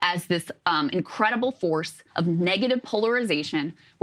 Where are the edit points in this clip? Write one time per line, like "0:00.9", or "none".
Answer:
0:02.1